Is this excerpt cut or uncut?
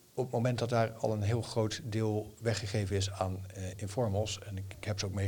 uncut